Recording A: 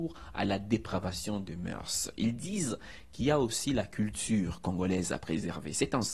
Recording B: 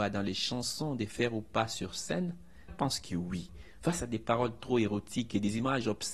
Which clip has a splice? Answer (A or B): B